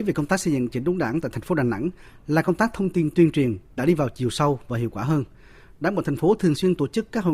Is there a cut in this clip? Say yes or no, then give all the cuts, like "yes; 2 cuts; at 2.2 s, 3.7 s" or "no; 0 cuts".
no; 0 cuts